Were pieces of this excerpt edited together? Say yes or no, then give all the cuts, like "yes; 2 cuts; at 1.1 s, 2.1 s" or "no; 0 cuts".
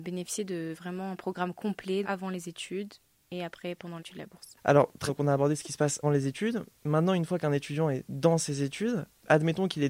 yes; 4 cuts; at 2.0 s, 4.0 s, 5.1 s, 6.0 s